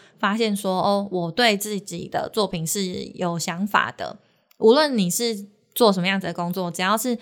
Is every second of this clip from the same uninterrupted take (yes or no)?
yes